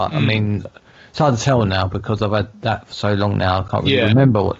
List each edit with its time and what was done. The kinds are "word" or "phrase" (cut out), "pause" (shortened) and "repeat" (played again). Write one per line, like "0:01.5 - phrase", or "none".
none